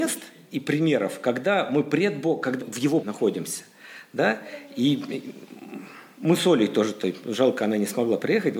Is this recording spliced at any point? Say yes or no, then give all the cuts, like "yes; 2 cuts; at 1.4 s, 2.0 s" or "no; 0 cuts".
yes; 2 cuts; at 2.6 s, 3.0 s